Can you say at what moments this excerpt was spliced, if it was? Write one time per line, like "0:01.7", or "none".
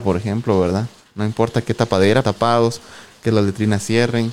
0:02.2